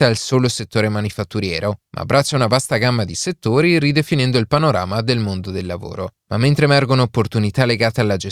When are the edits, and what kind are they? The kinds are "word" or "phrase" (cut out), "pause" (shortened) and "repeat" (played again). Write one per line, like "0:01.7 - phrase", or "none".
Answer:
none